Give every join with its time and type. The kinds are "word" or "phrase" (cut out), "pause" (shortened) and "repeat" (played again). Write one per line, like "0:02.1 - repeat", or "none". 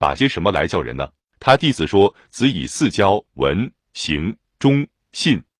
0:01.2 - pause
0:03.3 - pause